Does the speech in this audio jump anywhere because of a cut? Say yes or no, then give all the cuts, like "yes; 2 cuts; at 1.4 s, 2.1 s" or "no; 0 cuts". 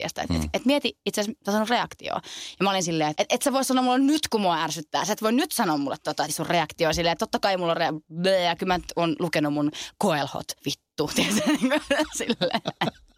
yes; 3 cuts; at 3.1 s, 6.3 s, 10.6 s